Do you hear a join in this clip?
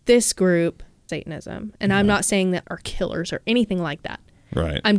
yes; 2 cuts; at 1.1 s, 2.6 s

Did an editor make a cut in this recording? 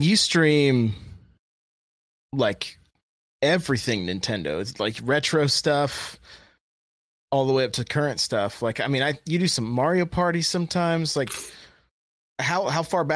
no; 0 cuts

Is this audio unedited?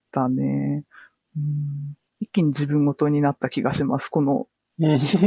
no; 1 cut; at 2.1 s

